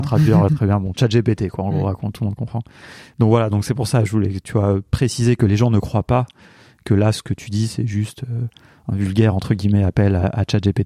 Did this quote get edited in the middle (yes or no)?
no